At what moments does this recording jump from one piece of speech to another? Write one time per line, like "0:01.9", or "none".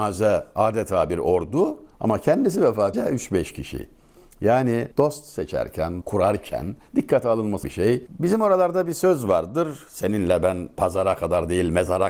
0:01.9
0:02.9
0:04.9
0:06.0
0:06.9
0:07.6